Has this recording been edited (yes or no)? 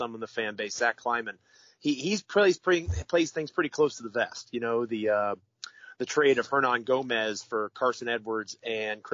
no